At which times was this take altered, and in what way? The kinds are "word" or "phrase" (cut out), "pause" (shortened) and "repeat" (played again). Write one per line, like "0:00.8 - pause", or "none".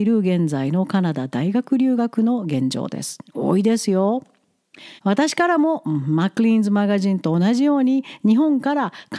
0:05.0 - pause

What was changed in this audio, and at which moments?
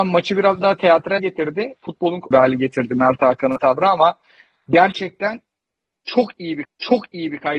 0:01.2 - word
0:02.3 - phrase
0:03.6 - phrase
0:06.6 - repeat

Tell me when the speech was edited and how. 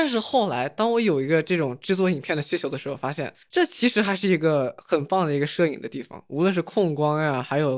0:03.4 - pause

